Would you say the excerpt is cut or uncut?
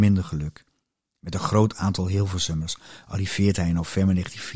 uncut